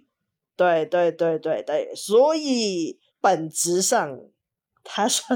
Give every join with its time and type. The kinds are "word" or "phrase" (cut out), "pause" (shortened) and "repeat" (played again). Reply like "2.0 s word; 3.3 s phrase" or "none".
3.1 s pause